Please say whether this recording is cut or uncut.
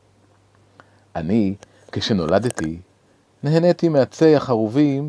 uncut